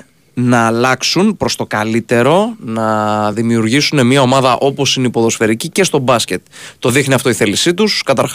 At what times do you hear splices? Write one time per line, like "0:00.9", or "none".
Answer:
none